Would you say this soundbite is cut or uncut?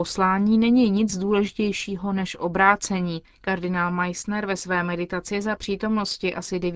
uncut